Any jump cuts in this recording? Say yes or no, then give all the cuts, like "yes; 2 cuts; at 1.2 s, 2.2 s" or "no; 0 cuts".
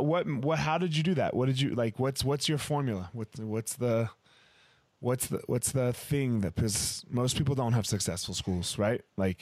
no; 0 cuts